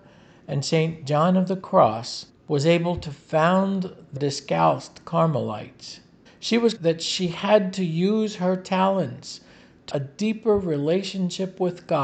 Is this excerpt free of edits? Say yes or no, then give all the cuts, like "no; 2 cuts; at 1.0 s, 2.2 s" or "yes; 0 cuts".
no; 5 cuts; at 2.3 s, 4.2 s, 6.3 s, 6.8 s, 9.9 s